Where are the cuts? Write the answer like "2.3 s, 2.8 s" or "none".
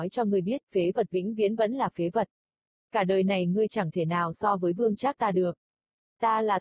none